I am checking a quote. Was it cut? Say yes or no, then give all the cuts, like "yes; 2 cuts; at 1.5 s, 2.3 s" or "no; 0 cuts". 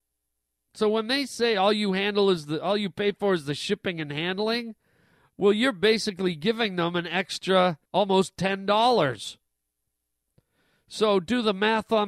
yes; 1 cut; at 7.9 s